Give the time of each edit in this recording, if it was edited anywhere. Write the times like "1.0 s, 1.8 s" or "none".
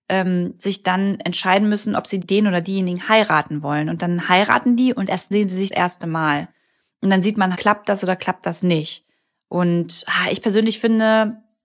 2.2 s, 5.3 s, 5.7 s, 7.5 s